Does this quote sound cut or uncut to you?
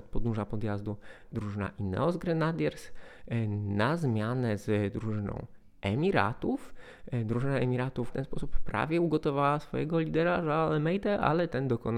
cut